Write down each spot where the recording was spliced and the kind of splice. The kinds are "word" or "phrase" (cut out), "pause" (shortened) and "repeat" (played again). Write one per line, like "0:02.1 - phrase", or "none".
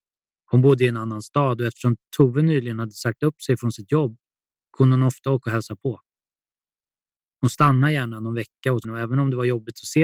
0:08.8 - word